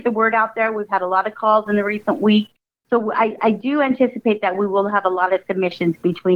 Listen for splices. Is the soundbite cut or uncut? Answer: uncut